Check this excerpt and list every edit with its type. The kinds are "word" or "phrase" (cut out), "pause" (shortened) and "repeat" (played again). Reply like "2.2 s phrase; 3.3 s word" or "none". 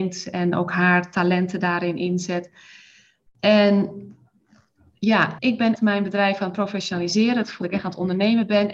5.4 s word; 5.8 s word; 7.6 s word